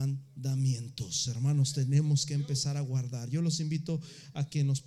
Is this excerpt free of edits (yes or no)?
yes